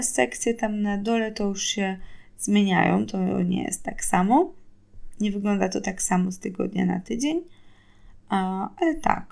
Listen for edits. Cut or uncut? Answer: uncut